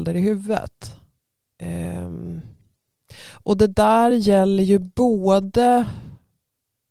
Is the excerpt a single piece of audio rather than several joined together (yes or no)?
yes